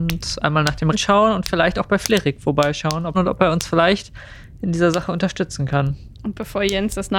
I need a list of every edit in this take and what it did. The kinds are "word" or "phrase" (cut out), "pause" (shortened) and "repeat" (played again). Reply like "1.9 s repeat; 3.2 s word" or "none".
0.9 s word; 3.1 s phrase